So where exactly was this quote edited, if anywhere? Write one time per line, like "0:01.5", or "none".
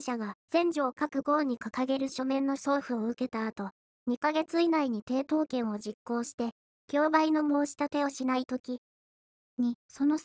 none